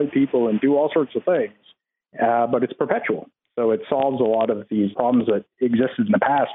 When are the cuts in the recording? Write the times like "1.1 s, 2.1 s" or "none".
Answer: 4.9 s